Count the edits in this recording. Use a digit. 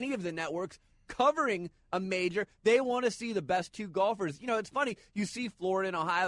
0